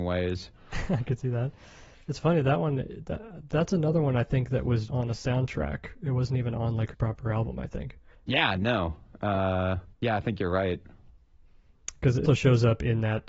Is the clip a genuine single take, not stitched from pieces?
no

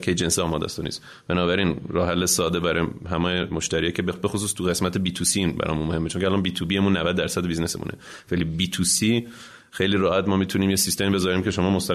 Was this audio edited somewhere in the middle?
no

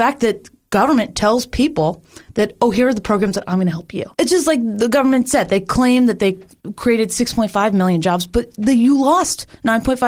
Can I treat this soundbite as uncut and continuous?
no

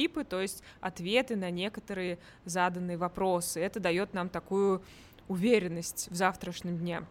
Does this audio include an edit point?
no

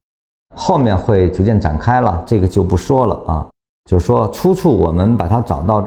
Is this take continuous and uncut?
yes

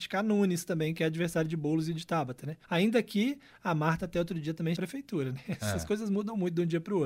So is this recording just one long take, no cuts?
no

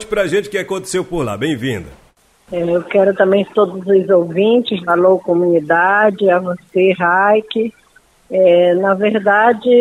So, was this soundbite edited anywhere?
yes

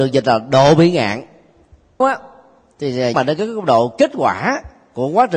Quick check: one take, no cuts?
no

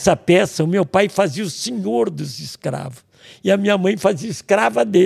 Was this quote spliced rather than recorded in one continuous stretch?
no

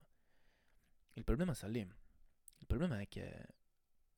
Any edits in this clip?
no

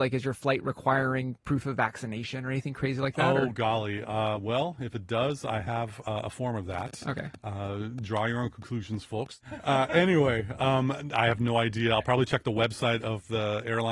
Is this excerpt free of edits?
no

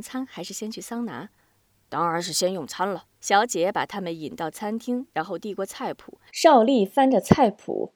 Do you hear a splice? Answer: yes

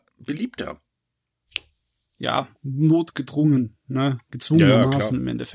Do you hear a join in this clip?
no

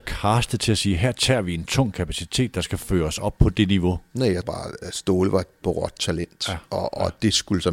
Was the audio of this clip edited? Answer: yes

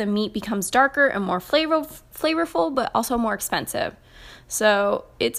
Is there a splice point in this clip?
no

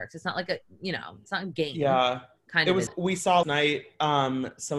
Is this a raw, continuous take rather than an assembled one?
no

